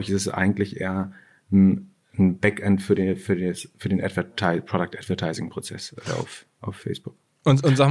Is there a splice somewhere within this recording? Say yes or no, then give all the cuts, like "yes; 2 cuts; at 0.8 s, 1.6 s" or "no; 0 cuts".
no; 0 cuts